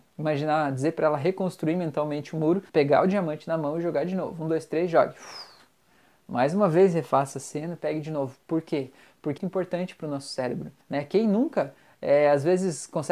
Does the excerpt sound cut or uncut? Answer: cut